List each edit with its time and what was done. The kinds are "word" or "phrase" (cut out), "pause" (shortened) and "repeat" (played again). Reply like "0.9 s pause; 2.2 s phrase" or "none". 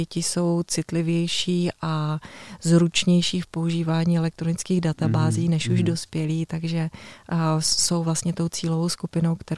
none